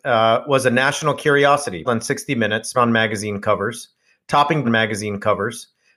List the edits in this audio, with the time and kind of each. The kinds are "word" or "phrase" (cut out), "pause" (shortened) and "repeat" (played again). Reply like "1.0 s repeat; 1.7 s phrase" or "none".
1.8 s word; 2.7 s word; 4.6 s repeat